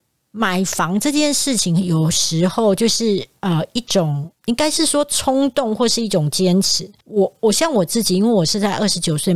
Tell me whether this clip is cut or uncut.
cut